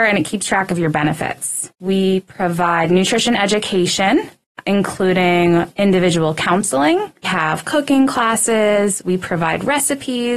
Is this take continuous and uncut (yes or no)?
no